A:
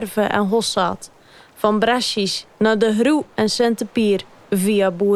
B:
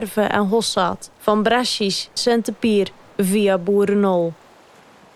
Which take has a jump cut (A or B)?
B